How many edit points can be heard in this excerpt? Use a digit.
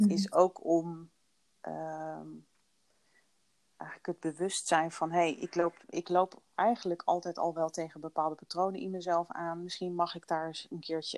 0